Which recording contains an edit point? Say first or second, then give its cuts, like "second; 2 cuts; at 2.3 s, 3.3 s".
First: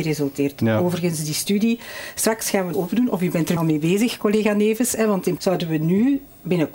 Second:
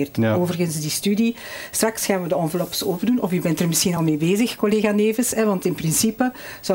first; 3 cuts; at 2.7 s, 3.6 s, 5.4 s